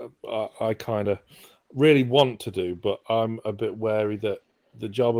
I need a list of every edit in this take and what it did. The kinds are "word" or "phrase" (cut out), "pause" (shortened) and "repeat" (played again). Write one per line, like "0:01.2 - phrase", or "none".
none